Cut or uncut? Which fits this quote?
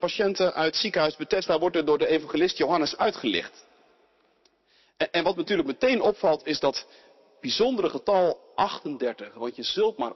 uncut